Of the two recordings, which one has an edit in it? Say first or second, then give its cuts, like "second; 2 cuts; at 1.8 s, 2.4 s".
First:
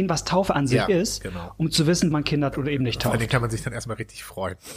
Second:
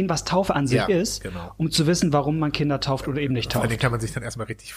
first; 2 cuts; at 2.1 s, 2.5 s